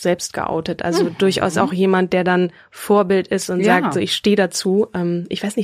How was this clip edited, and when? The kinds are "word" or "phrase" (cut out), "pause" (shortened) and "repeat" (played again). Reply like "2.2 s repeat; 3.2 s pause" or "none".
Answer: none